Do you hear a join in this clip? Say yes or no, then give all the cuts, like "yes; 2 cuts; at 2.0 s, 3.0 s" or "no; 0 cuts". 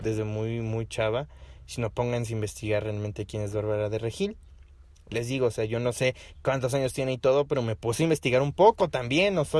no; 0 cuts